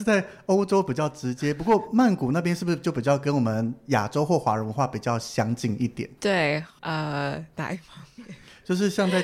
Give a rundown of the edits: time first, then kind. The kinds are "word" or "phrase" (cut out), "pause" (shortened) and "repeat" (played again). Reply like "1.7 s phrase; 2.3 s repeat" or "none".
6.2 s pause